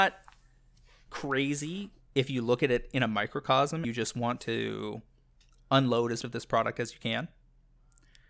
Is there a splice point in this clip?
yes; 2 cuts; at 3.8 s, 6.2 s

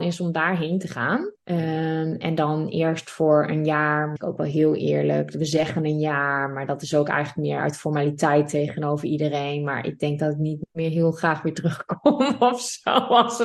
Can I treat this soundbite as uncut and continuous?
no; 2 cuts; at 1.4 s, 4.2 s

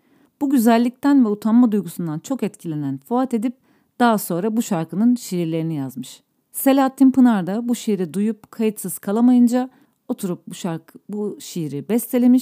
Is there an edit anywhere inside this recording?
no; 0 cuts

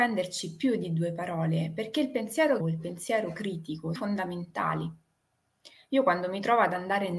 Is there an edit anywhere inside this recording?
yes; 2 cuts; at 2.6 s, 3.9 s

